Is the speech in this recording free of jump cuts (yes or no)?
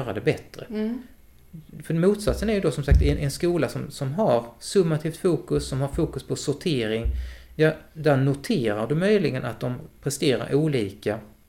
yes